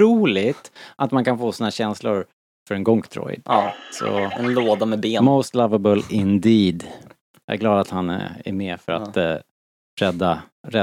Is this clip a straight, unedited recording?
yes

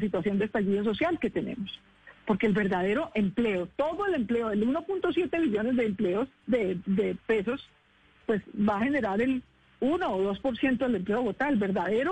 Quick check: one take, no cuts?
yes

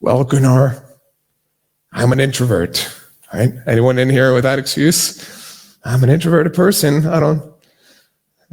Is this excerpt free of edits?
yes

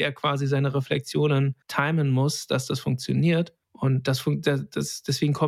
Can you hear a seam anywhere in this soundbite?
yes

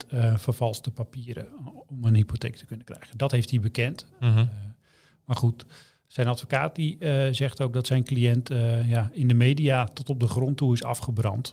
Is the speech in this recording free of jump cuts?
yes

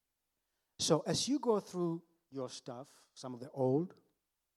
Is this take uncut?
yes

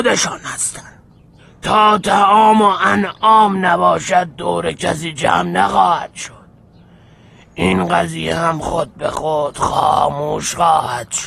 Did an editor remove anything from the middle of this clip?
no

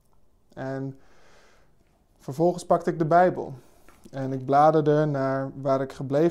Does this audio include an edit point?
no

